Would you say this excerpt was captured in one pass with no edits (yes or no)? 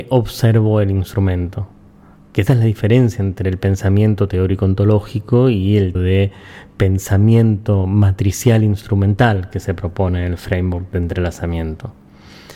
no